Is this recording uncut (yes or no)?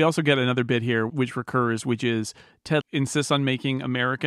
no